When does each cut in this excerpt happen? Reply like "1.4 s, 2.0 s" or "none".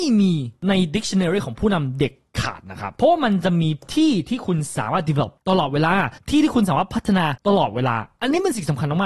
none

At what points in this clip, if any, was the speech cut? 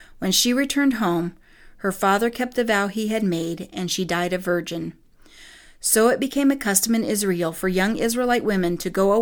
none

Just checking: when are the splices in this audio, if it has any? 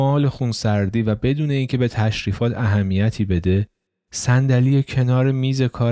none

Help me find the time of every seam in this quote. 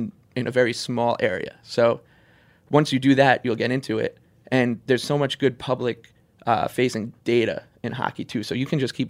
7.2 s

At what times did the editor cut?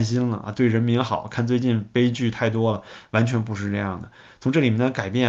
none

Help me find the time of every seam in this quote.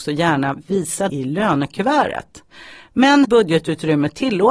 1.1 s, 3.2 s

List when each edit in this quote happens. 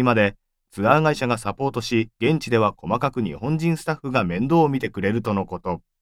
2.1 s

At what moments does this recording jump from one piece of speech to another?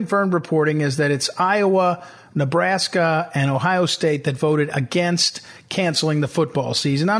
none

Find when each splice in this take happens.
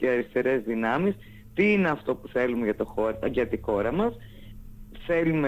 none

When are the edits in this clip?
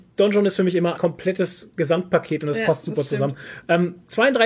1.0 s

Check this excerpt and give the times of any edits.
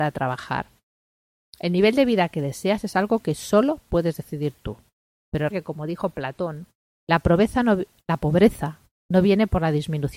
5.5 s

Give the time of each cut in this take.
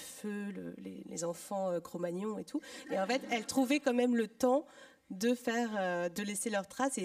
none

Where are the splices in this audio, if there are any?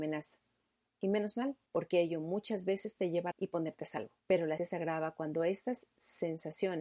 1.7 s, 3.3 s, 4.2 s, 4.6 s

